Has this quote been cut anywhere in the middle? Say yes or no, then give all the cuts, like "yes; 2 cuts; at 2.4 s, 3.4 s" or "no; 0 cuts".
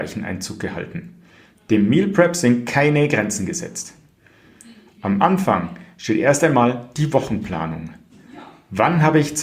no; 0 cuts